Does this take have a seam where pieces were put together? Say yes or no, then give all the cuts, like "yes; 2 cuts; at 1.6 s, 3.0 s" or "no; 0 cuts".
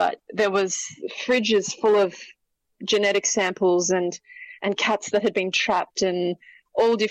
no; 0 cuts